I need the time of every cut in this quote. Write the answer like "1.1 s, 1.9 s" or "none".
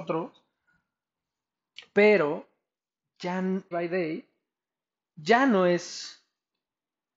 3.7 s